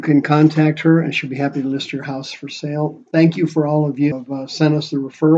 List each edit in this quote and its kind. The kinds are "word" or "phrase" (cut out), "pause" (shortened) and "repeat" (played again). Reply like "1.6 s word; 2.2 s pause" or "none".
4.1 s word